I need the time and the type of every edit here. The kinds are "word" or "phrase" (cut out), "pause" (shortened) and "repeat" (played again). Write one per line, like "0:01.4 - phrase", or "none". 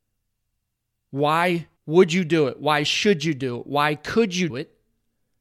0:01.8 - pause
0:04.5 - word